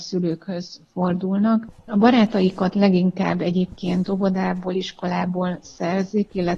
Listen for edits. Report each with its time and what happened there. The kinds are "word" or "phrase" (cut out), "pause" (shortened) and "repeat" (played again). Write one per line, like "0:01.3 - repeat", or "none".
none